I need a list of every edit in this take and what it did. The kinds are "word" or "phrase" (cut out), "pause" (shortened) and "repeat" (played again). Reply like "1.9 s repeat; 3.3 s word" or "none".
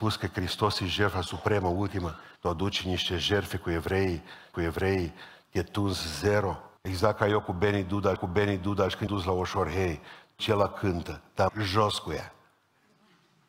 2.4 s pause; 4.5 s repeat; 6.8 s pause; 8.2 s repeat; 9.1 s word; 10.4 s word; 11.5 s phrase